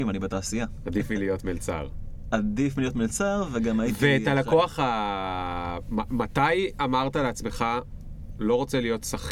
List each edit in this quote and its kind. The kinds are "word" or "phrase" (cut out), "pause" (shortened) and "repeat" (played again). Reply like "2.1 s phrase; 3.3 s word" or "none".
none